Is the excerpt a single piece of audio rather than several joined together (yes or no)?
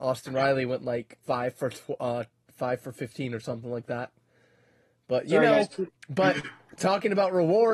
no